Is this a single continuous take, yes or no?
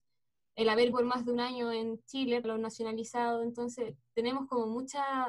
no